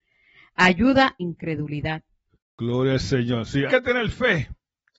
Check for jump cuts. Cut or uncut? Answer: cut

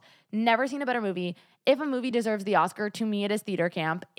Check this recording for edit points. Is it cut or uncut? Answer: uncut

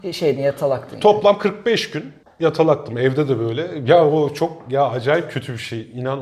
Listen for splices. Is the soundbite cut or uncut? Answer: cut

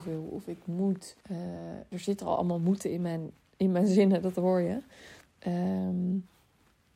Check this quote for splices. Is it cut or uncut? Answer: cut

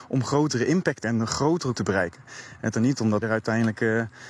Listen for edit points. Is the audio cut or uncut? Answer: cut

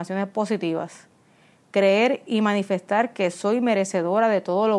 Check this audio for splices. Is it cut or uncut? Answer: uncut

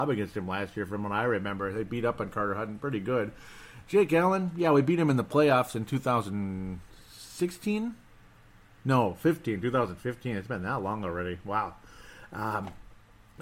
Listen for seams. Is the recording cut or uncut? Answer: uncut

